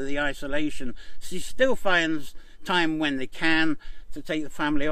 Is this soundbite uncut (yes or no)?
yes